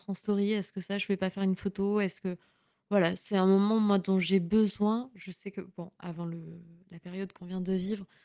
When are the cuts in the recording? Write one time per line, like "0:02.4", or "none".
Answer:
none